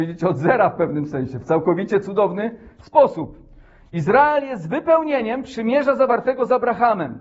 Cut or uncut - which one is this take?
uncut